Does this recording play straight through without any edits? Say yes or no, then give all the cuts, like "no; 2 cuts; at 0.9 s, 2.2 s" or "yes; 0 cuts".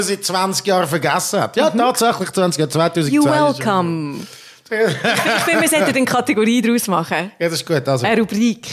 yes; 0 cuts